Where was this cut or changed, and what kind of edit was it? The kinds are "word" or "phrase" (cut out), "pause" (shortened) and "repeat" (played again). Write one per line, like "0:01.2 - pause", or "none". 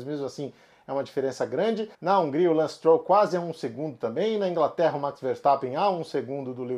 0:01.9 - pause